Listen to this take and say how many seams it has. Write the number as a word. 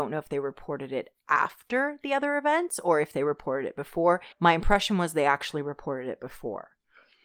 one